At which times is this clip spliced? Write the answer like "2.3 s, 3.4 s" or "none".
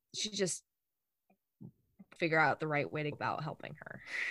2.2 s, 3.1 s

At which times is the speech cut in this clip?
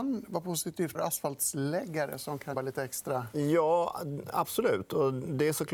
0.9 s, 2.5 s

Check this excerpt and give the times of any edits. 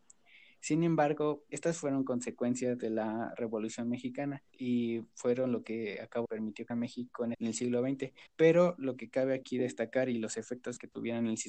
1.5 s, 4.5 s, 6.2 s, 6.7 s, 7.3 s, 8.3 s

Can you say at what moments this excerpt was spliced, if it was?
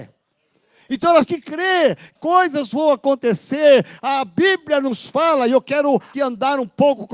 1.3 s, 2.2 s, 6.1 s

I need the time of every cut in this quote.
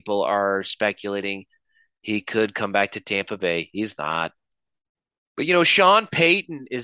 none

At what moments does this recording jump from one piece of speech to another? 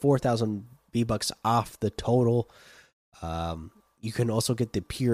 none

